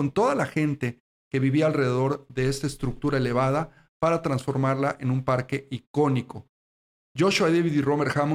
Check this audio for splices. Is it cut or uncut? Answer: uncut